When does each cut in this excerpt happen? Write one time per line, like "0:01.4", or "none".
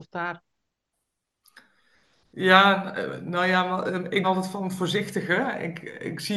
0:04.2